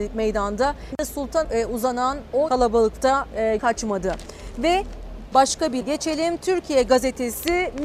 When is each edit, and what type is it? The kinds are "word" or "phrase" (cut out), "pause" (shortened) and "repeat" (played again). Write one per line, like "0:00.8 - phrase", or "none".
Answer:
0:00.9 - word
0:01.4 - word
0:02.5 - word
0:03.6 - word
0:05.8 - word

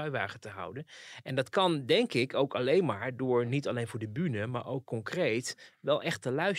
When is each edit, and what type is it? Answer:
none

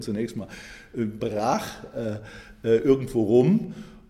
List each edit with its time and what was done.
0:01.2 - phrase

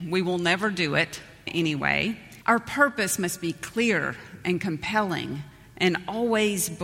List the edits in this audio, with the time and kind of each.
0:01.5 - phrase
0:02.4 - pause

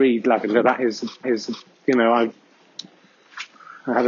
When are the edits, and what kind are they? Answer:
0:01.2 - repeat

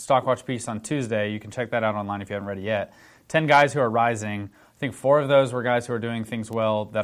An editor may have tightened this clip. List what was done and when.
none

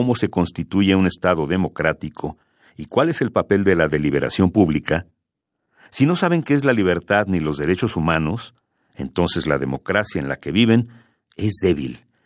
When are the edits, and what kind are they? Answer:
none

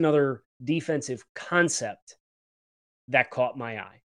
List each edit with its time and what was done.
none

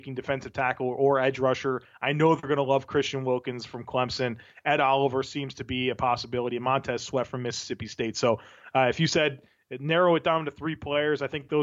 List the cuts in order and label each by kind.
none

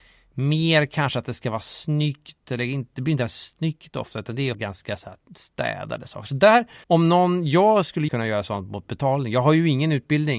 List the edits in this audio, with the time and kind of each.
0:04.5 - word
0:06.8 - pause
0:08.1 - word

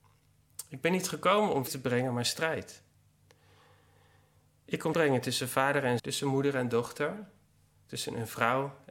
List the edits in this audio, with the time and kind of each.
0:01.7 - word
0:04.9 - word
0:06.0 - word

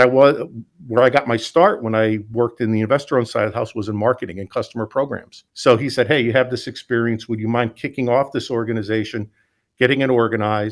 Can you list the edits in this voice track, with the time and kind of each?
0:05.5 - pause

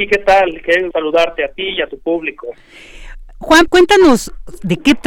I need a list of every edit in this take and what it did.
0:00.9 - word
0:03.7 - word

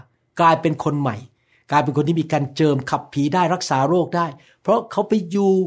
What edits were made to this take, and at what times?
none

